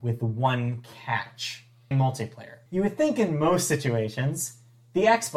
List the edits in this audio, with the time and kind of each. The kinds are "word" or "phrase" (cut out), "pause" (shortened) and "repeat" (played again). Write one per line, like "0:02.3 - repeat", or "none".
0:01.9 - word
0:02.7 - pause